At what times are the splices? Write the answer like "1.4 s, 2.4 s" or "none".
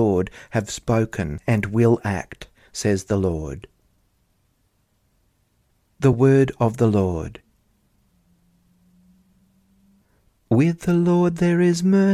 none